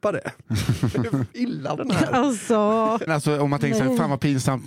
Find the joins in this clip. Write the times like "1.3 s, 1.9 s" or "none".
1.8 s, 3.1 s